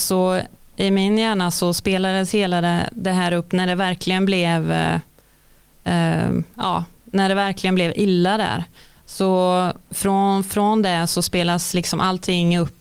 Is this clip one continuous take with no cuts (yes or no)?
yes